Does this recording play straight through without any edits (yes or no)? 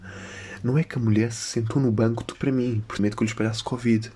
no